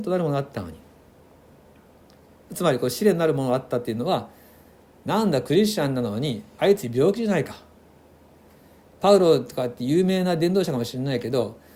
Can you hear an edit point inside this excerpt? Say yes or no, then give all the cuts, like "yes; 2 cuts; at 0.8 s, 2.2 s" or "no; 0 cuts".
no; 0 cuts